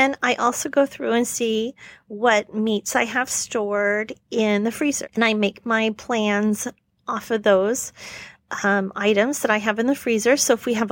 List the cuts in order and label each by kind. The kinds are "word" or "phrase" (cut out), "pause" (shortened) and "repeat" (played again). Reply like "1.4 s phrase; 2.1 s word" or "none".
none